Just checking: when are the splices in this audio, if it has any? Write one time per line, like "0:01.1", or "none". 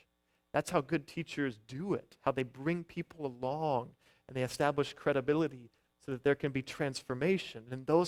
none